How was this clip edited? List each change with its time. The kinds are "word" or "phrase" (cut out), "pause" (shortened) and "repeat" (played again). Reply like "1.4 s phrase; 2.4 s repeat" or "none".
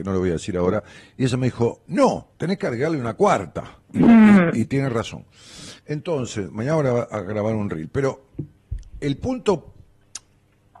2.3 s pause; 3.8 s pause; 5.8 s pause